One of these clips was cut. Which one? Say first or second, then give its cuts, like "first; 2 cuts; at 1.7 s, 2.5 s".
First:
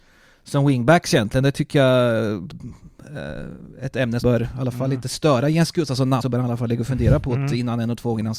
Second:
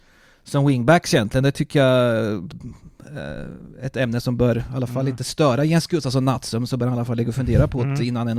first; 2 cuts; at 4.2 s, 6.2 s